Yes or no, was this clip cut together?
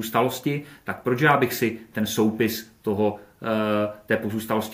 no